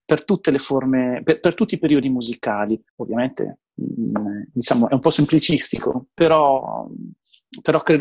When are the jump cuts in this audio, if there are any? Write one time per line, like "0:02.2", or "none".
0:02.9

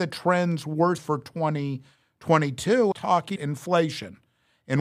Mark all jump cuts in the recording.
0:01.0
0:02.9
0:03.4

